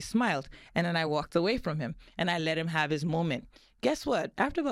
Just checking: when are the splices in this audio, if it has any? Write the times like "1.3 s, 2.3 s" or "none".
none